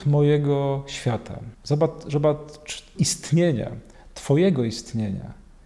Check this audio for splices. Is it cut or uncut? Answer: cut